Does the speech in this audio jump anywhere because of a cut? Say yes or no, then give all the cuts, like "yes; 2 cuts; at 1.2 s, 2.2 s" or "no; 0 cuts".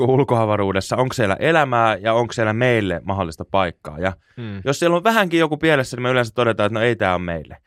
no; 0 cuts